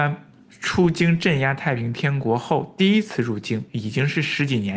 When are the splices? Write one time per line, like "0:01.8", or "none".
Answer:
0:03.7